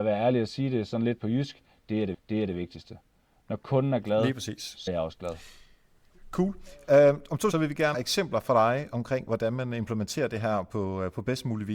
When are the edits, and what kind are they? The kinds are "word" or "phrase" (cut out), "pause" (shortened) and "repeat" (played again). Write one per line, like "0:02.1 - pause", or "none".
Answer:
0:02.1 - repeat
0:04.9 - word
0:07.5 - phrase
0:07.9 - phrase